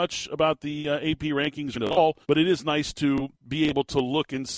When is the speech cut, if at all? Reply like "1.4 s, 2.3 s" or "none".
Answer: 1.7 s, 2.2 s, 3.3 s